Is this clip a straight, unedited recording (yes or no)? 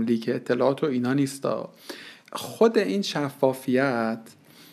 no